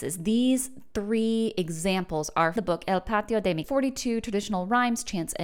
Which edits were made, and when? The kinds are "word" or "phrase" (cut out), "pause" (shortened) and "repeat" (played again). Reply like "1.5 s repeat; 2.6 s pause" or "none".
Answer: 2.6 s word; 3.6 s phrase